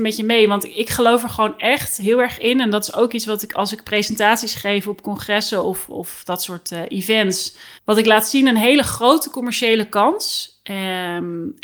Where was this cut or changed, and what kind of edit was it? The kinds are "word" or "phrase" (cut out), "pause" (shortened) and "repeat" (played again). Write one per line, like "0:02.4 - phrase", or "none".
0:07.8 - pause